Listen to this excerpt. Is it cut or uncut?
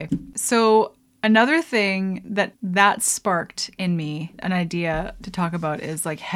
uncut